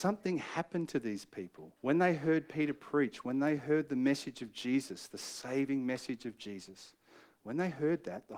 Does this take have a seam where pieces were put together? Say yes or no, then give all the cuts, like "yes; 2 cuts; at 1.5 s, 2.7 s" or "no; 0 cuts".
yes; 1 cut; at 1.8 s